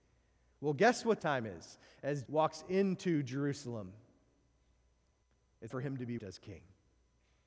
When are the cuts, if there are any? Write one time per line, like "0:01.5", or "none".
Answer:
0:01.2
0:02.2
0:05.7
0:06.2